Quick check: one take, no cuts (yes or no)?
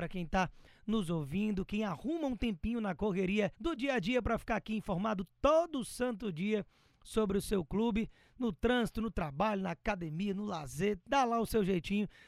no